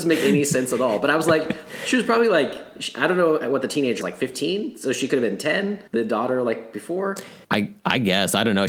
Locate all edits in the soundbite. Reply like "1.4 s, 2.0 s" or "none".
4.0 s, 5.9 s, 7.4 s